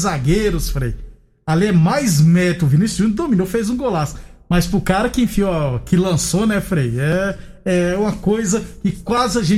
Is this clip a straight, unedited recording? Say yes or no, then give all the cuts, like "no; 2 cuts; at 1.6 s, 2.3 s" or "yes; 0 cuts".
yes; 0 cuts